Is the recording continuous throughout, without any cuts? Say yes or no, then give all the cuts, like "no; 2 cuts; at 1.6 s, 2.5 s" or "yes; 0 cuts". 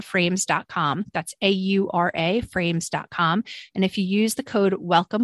yes; 0 cuts